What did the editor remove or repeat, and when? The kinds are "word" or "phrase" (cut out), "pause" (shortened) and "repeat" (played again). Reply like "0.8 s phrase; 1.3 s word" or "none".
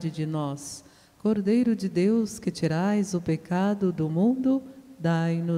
none

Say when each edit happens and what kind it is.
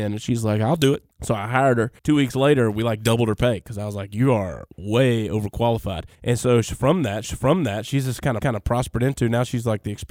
1.1 s pause; 2.0 s pause; 6.1 s pause; 7.2 s repeat; 8.4 s repeat

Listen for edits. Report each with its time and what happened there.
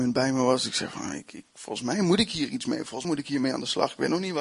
3.0 s word

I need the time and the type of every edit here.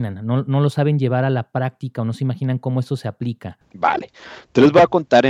3.7 s pause

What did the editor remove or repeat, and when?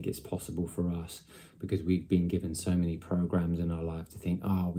none

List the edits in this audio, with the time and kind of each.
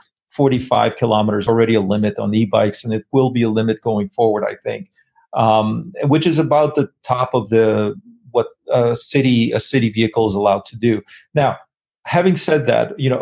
1.5 s phrase

